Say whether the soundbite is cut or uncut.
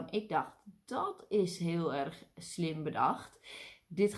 uncut